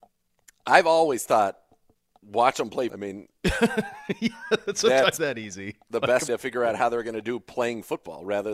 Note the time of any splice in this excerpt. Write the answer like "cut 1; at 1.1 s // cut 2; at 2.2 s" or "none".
cut 1; at 1.9 s // cut 2; at 2.9 s // cut 3; at 5.2 s // cut 4; at 6.3 s